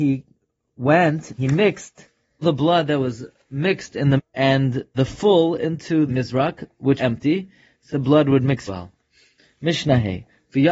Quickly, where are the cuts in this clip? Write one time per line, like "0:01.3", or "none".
0:01.4
0:02.4
0:04.2
0:04.9
0:06.1
0:07.0
0:07.9
0:08.7